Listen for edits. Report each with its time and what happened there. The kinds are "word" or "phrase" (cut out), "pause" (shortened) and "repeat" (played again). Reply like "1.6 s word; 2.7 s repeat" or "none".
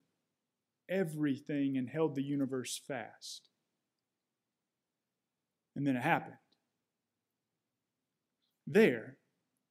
none